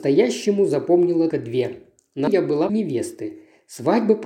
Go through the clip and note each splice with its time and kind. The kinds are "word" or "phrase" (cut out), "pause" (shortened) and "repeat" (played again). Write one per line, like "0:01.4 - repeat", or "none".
0:01.3 - word
0:02.3 - word
0:02.7 - word